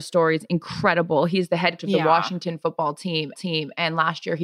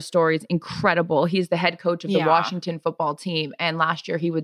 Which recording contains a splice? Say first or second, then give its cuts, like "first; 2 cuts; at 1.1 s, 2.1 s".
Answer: first; 2 cuts; at 1.8 s, 3.3 s